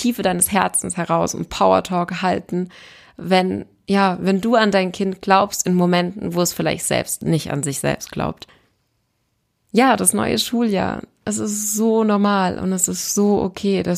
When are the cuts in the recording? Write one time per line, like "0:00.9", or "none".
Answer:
none